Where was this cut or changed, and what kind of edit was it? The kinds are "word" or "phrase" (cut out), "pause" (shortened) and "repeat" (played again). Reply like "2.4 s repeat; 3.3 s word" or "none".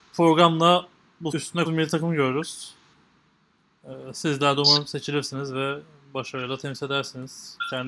1.3 s word; 1.7 s word